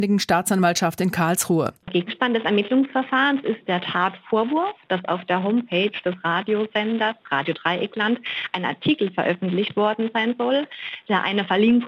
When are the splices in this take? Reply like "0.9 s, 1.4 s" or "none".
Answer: none